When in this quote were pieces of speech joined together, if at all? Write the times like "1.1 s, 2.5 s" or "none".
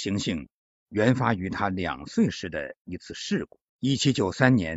3.7 s